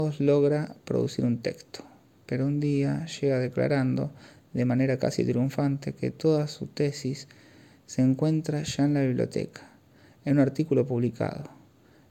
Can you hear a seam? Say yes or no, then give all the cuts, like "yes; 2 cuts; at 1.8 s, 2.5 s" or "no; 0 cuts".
no; 0 cuts